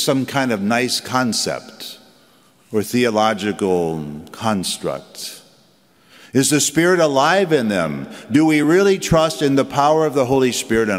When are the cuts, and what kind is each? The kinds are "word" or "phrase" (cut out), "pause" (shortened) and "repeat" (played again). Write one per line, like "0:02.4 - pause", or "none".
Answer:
none